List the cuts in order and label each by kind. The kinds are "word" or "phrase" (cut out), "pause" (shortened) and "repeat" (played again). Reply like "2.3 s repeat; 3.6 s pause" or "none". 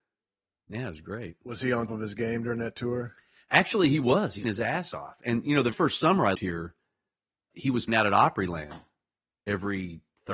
1.9 s word; 4.4 s word; 5.7 s word; 6.3 s word; 7.5 s word; 7.9 s word